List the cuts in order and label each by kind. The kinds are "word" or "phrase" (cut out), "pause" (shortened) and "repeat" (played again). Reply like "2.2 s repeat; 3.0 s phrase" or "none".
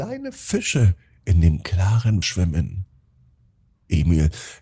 2.2 s word